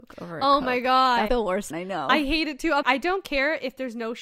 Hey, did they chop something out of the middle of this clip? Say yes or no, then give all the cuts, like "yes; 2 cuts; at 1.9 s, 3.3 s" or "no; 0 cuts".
yes; 3 cuts; at 1.3 s, 1.7 s, 2.8 s